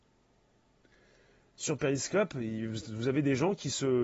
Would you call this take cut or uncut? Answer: uncut